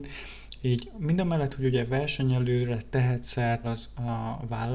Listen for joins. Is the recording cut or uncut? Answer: cut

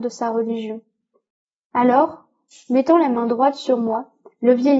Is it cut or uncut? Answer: uncut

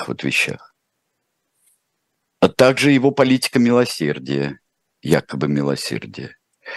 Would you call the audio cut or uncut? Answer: uncut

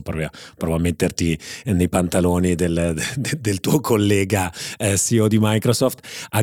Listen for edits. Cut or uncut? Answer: uncut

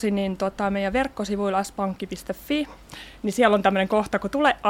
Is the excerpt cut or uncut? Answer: uncut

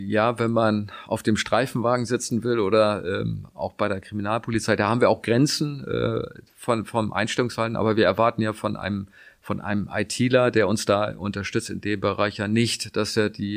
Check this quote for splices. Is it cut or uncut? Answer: cut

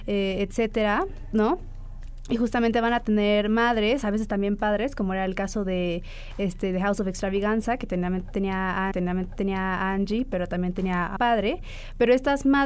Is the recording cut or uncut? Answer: cut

